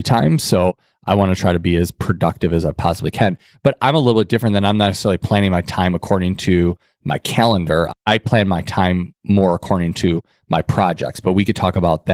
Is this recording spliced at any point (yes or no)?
no